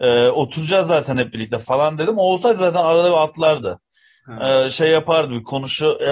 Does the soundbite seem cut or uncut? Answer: uncut